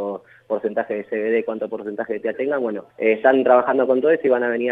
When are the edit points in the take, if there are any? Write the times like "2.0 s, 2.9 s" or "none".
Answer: 2.3 s, 2.9 s